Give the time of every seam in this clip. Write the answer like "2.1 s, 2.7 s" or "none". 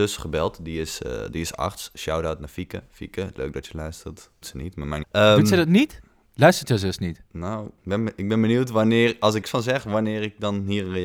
4.4 s, 5.0 s, 9.4 s